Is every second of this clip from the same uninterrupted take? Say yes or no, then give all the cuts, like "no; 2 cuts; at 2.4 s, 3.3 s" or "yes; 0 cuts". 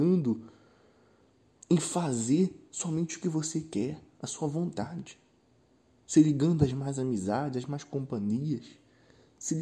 yes; 0 cuts